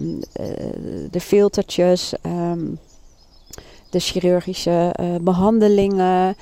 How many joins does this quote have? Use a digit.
0